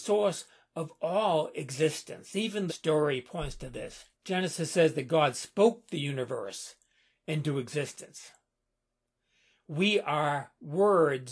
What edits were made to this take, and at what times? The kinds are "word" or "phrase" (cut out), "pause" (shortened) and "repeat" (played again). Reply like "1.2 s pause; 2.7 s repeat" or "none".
2.7 s phrase; 4.1 s pause